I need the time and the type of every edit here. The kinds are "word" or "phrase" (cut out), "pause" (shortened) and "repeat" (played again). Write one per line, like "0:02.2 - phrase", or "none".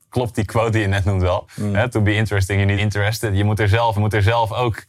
0:02.8 - phrase
0:04.0 - repeat